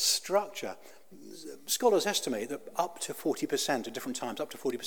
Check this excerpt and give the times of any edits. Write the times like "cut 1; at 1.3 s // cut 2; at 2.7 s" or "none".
none